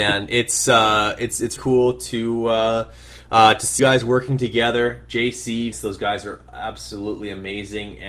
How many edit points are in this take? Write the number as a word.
three